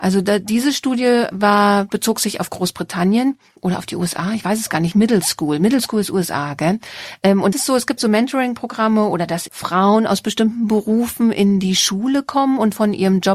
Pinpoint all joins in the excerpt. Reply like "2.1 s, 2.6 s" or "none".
7.5 s, 8.0 s, 9.5 s